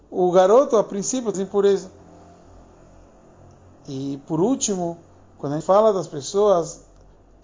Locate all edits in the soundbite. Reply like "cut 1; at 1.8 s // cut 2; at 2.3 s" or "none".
cut 1; at 1.3 s // cut 2; at 5.6 s